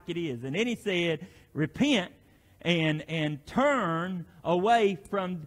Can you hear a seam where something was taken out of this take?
no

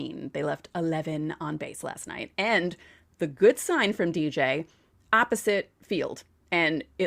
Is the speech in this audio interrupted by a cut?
no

